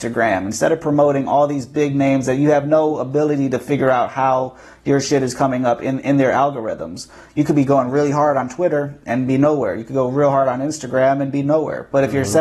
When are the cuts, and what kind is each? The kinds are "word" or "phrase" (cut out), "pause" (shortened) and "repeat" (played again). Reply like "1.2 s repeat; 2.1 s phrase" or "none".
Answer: none

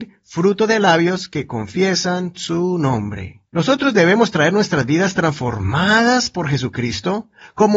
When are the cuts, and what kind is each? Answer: 3.5 s pause

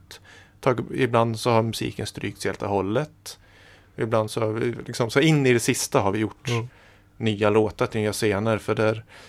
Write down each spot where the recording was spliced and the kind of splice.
none

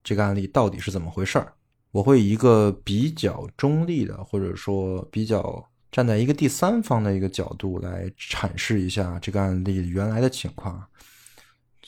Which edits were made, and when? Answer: 1.7 s pause; 5.8 s pause

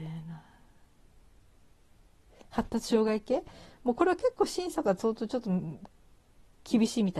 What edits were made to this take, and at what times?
none

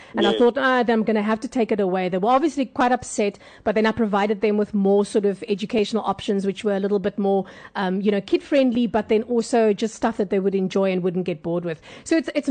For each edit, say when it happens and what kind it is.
none

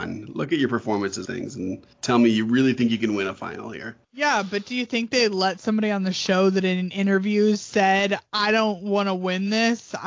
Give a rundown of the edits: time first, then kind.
1.3 s phrase; 1.9 s pause; 4.0 s pause

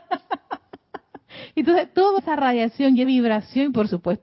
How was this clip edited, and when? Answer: 2.2 s phrase; 3.0 s word

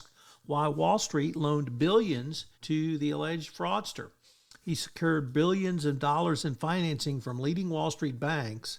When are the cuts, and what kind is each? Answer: 2.5 s pause

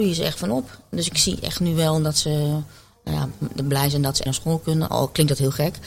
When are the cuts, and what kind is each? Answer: 4.3 s word

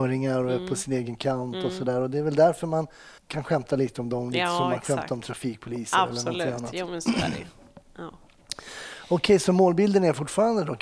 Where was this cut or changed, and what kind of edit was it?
3.2 s pause

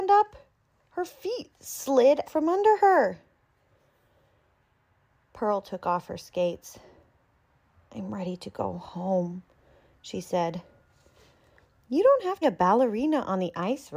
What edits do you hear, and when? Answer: 2.2 s word; 12.4 s phrase

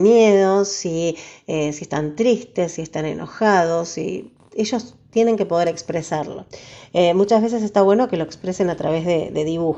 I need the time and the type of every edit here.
none

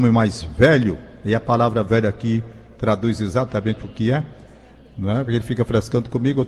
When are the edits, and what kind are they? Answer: none

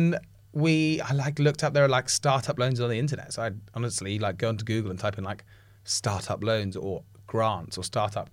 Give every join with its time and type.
none

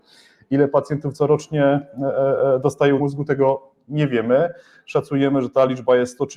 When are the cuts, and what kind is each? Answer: 3.0 s word

